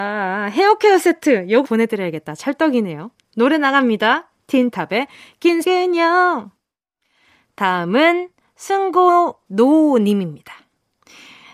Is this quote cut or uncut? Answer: cut